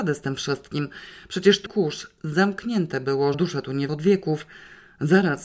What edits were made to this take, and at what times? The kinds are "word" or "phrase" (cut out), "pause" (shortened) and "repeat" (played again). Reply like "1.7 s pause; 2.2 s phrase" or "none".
1.7 s phrase; 3.3 s word; 3.9 s word